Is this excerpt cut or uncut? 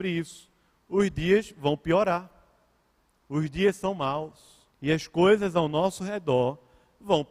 cut